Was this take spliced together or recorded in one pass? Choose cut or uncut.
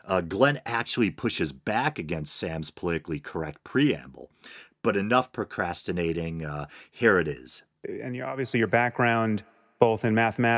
uncut